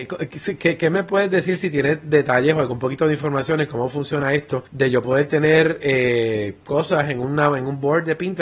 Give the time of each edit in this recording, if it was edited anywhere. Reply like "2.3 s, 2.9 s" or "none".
4.7 s